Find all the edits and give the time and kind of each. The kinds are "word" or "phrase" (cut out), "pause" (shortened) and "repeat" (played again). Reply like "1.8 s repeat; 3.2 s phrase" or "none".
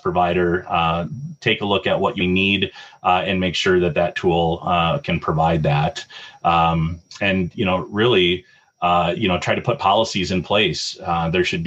2.2 s word